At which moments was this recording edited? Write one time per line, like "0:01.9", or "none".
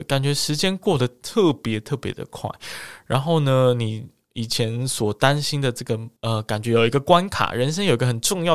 0:06.2

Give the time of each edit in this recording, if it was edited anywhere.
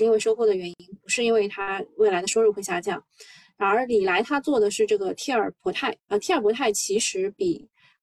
none

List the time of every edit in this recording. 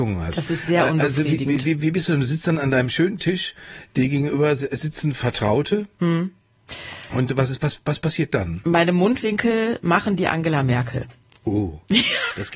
none

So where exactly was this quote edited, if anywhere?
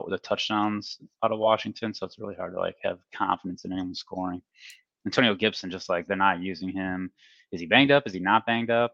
none

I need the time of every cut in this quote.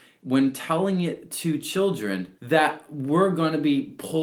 0:02.4

